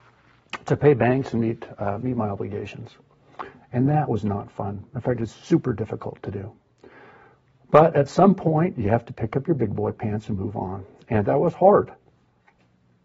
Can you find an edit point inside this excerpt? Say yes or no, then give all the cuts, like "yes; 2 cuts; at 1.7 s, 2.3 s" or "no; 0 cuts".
no; 0 cuts